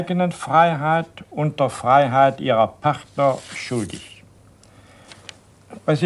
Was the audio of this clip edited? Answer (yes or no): no